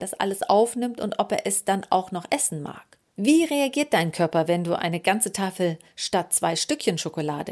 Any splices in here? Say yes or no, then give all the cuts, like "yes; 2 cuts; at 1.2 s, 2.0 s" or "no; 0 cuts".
yes; 1 cut; at 3.1 s